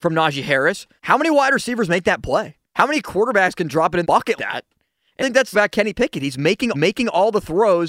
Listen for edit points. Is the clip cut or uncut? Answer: cut